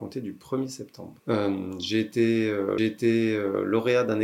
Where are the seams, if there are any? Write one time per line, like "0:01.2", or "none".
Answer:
0:01.2
0:02.8

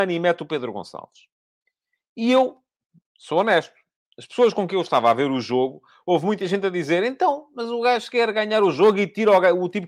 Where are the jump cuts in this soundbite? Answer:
none

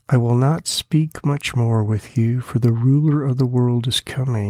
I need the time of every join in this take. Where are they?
none

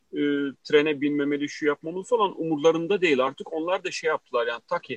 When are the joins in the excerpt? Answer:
none

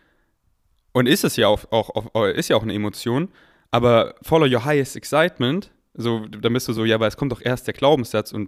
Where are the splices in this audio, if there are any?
none

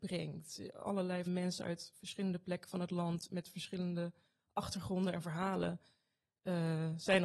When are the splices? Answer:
0:01.3

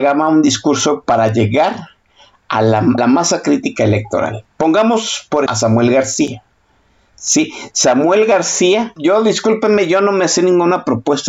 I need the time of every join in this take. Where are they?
0:01.0
0:03.0
0:05.5
0:09.0

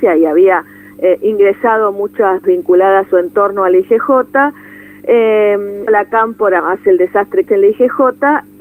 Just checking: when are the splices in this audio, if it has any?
0:02.4
0:03.1
0:05.9
0:06.6
0:07.5

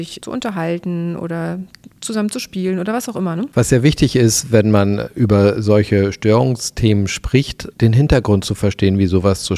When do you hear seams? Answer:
0:02.0

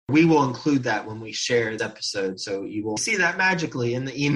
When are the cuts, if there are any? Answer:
0:01.8
0:03.0

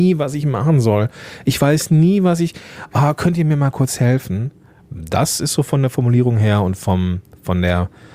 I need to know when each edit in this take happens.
none

